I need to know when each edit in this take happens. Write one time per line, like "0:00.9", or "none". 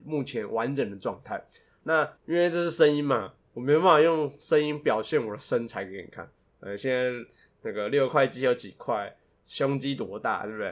0:02.2